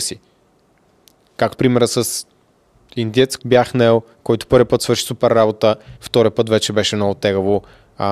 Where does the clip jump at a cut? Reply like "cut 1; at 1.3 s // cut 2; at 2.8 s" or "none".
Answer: cut 1; at 1.5 s // cut 2; at 3.4 s // cut 3; at 6.0 s